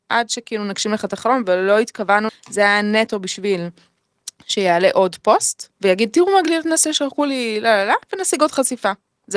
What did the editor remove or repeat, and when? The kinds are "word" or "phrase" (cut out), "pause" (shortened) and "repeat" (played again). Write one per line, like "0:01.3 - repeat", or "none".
0:02.3 - word
0:05.7 - pause